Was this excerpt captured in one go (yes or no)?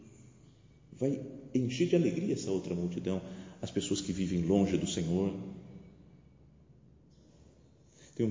yes